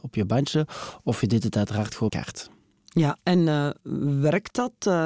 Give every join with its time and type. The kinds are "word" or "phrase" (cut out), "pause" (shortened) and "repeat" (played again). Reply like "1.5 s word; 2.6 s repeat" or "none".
2.1 s phrase

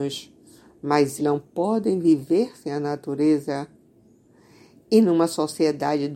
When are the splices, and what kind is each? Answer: 1.2 s word

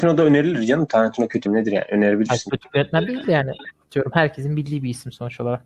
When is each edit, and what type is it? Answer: 1.5 s phrase

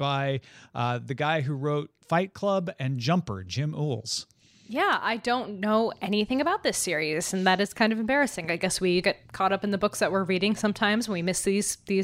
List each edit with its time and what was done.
9.0 s word

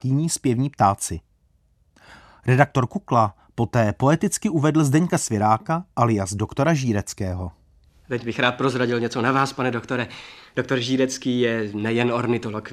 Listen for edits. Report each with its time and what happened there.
none

